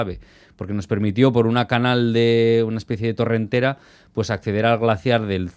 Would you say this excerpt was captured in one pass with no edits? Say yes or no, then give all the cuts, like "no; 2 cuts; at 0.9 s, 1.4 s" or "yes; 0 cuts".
yes; 0 cuts